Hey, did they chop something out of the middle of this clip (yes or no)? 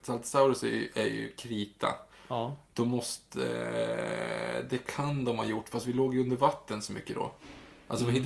no